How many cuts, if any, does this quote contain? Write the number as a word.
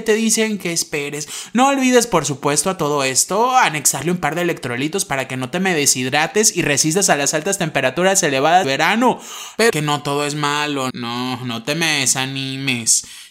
three